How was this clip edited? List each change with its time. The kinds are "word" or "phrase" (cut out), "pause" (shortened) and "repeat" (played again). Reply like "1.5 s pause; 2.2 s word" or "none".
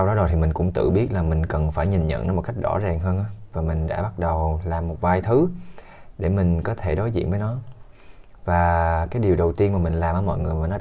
none